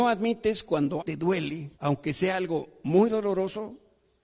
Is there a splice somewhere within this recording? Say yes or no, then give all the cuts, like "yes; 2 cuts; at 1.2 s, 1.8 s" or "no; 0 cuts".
yes; 2 cuts; at 1.0 s, 1.7 s